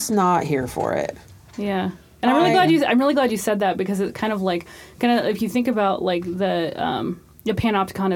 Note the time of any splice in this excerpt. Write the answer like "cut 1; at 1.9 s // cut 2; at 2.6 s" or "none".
none